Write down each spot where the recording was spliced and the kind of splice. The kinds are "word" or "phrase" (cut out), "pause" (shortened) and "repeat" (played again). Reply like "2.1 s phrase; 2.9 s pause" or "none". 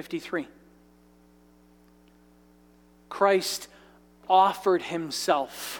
none